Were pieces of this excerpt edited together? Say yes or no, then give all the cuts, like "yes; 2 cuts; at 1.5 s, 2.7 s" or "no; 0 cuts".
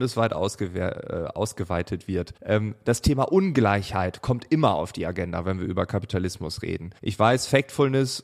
yes; 2 cuts; at 2.4 s, 7.0 s